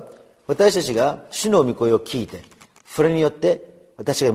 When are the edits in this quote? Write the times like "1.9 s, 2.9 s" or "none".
none